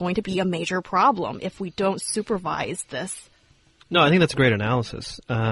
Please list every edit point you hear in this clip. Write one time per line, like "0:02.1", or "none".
none